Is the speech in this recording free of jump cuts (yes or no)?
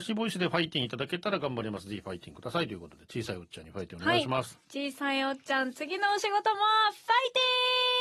yes